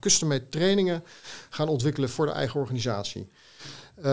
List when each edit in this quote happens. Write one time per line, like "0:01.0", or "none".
none